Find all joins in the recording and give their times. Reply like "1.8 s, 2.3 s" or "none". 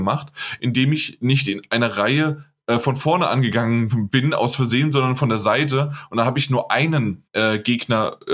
7.3 s